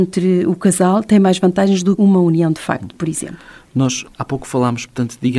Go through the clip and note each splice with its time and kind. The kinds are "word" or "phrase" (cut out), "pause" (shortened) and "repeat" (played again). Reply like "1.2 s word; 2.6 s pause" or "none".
2.0 s word; 4.1 s pause